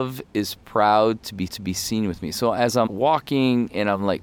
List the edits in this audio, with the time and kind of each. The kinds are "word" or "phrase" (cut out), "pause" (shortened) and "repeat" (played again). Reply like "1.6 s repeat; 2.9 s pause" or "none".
1.5 s repeat; 2.9 s word

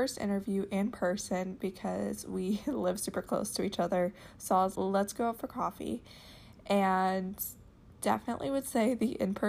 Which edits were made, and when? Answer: 4.8 s word

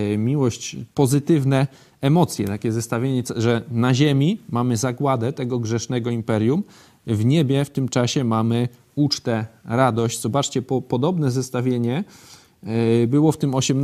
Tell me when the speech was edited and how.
0.9 s pause

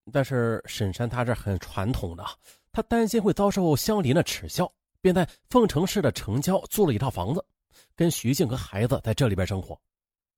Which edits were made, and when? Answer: none

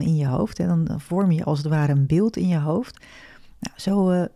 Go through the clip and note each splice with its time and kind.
none

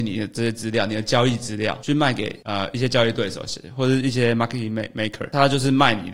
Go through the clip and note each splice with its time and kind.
none

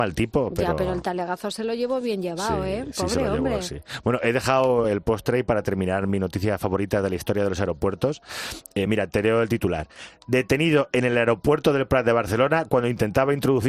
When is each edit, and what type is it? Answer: none

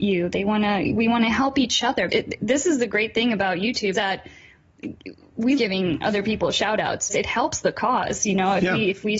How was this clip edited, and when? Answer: 2.1 s word; 3.9 s word; 5.6 s word; 7.1 s word

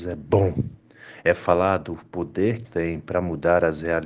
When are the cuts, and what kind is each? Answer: 2.6 s word

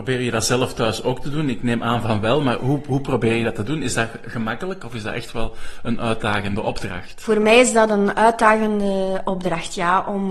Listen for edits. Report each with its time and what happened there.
none

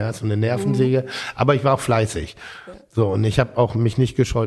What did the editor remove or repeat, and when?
none

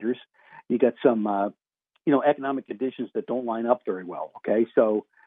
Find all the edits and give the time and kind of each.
1.7 s pause

